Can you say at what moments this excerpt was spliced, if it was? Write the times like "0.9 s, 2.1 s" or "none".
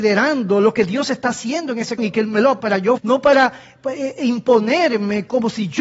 2.0 s, 2.6 s, 3.0 s

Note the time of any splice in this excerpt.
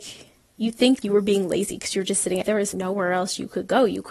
1.0 s, 2.4 s, 2.7 s

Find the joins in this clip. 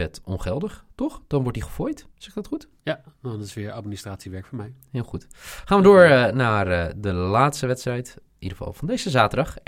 2.1 s, 2.8 s

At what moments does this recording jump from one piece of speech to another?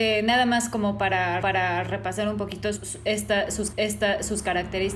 1.4 s, 2.8 s, 3.7 s

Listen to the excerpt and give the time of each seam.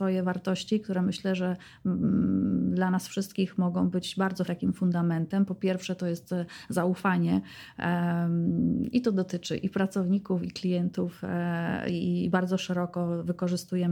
4.5 s

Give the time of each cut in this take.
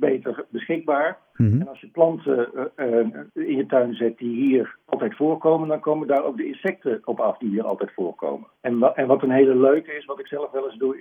3.3 s, 4.8 s, 8.6 s

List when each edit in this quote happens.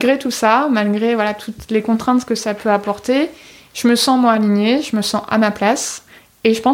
none

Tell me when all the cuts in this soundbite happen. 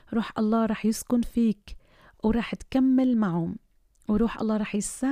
none

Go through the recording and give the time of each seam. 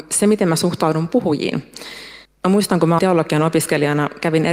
2.2 s, 3.0 s

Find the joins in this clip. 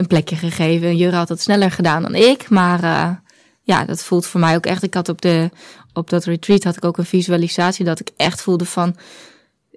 none

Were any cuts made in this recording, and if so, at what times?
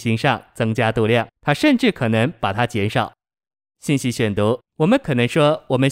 1.3 s, 3.5 s, 4.6 s

